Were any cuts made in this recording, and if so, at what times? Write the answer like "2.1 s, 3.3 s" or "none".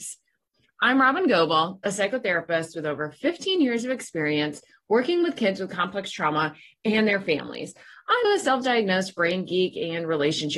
8.2 s

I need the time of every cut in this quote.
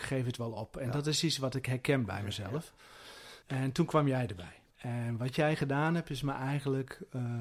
3.4 s, 4.7 s

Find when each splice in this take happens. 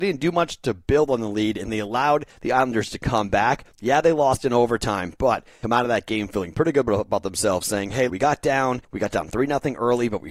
3.7 s, 5.6 s, 8.1 s, 8.8 s

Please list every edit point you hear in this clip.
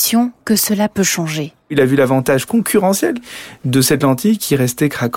none

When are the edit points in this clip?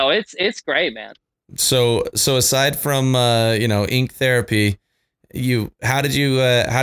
none

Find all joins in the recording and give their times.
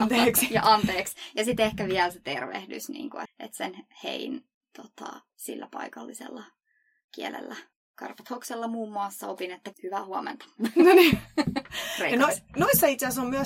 3.3 s, 5.3 s, 7.7 s, 9.7 s

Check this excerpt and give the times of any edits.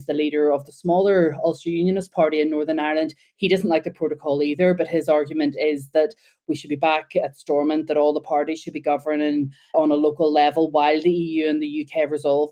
none

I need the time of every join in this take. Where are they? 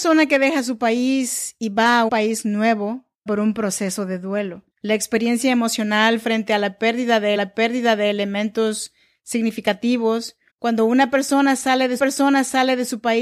2.1 s, 3.3 s, 4.7 s, 7.4 s, 10.5 s, 12.0 s

